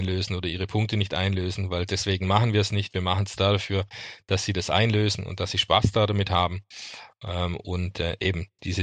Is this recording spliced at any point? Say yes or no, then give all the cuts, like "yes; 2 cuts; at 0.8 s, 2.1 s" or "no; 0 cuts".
no; 0 cuts